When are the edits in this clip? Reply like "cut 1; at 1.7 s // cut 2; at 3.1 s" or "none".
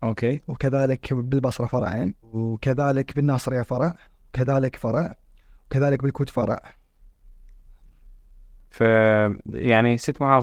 cut 1; at 2.2 s // cut 2; at 4.8 s